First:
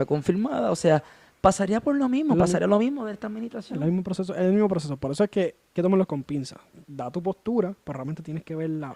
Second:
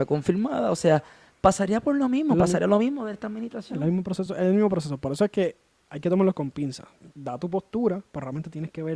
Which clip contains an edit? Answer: first; 1 cut; at 5.8 s

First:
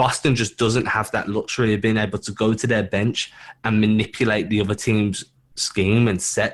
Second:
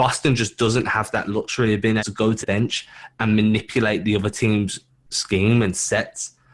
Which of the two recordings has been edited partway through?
second; 2 cuts; at 2.0 s, 2.4 s

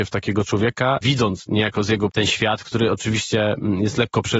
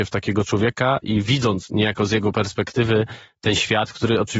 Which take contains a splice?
first; 2 cuts; at 1.0 s, 2.1 s

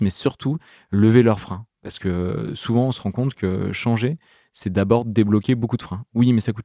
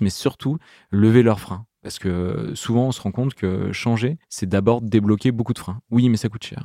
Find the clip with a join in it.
second; 1 cut; at 4.2 s

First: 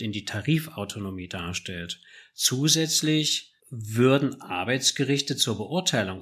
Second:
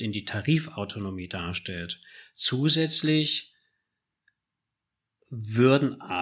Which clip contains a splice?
first; 1 cut; at 3.6 s

